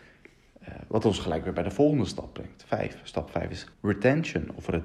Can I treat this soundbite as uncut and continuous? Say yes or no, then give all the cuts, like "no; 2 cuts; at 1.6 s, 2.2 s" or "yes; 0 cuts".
no; 1 cut; at 3.7 s